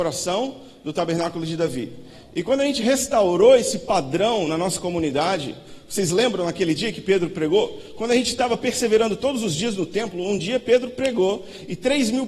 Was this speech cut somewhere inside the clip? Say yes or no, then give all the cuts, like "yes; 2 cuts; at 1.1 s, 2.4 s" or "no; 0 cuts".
no; 0 cuts